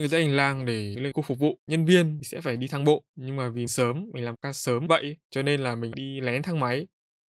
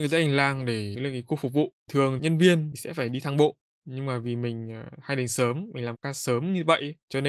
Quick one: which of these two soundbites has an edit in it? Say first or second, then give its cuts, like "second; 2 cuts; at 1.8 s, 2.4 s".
first; 6 cuts; at 1.1 s, 1.7 s, 3.1 s, 3.7 s, 4.9 s, 5.9 s